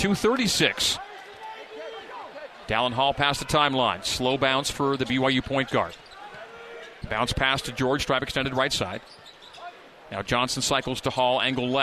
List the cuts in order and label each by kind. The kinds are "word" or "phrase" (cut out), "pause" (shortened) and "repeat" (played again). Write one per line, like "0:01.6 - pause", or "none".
none